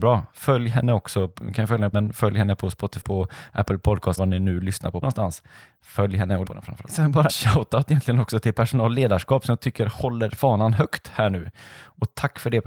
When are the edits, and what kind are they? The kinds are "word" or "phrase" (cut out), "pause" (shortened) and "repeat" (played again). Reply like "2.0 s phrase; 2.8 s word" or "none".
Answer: 1.9 s word; 3.0 s word; 4.2 s word; 5.0 s word; 6.4 s word; 7.3 s word